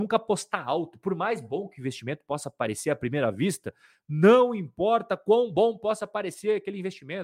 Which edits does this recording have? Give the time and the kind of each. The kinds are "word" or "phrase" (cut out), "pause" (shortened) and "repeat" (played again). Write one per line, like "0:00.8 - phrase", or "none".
none